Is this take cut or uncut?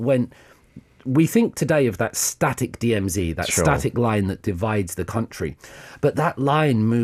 uncut